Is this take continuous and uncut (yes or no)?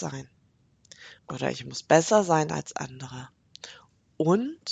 no